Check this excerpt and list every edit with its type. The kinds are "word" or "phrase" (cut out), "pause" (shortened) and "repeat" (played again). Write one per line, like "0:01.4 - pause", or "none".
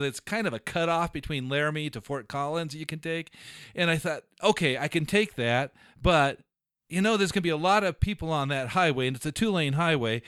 0:06.8 - pause